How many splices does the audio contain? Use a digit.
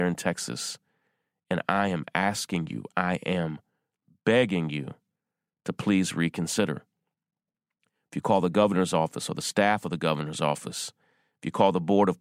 0